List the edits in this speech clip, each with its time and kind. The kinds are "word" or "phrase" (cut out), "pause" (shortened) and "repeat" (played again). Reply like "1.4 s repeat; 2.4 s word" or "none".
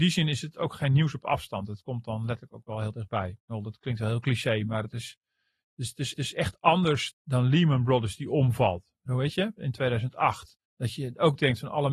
6.1 s repeat; 7.1 s word; 10.6 s pause